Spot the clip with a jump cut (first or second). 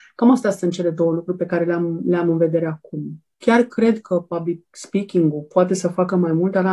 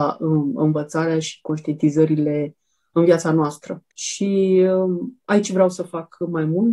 second